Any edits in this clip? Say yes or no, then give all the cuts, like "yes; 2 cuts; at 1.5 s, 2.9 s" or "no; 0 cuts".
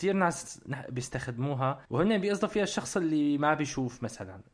yes; 1 cut; at 1.8 s